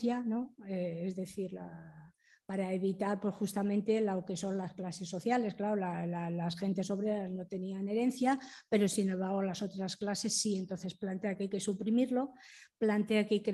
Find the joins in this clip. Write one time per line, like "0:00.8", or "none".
none